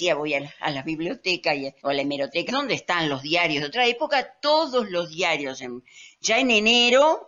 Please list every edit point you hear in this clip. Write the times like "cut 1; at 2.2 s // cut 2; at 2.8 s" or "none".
cut 1; at 1.8 s // cut 2; at 2.5 s